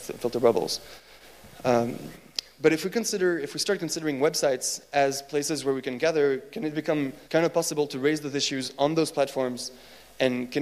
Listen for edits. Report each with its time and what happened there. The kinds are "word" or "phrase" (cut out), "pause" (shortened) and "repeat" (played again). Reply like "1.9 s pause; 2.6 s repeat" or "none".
7.2 s pause